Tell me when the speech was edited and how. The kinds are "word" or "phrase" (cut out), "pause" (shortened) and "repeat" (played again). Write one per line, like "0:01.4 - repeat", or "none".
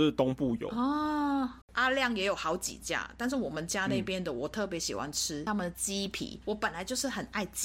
0:01.6 - pause
0:06.4 - word